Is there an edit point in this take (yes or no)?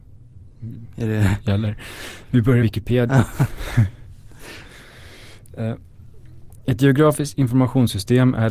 yes